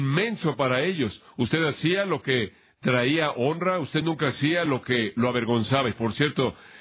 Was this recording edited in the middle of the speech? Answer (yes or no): no